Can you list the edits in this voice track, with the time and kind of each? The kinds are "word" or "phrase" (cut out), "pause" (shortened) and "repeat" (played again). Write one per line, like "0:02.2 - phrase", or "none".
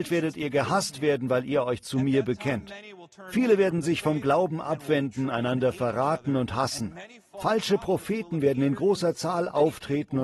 none